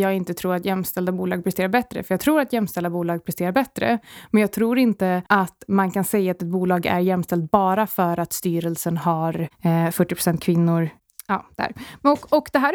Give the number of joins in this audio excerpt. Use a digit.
1